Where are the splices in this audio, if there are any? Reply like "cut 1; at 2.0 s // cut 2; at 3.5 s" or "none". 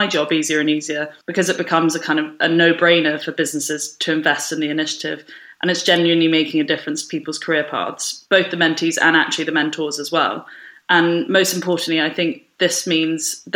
cut 1; at 1.2 s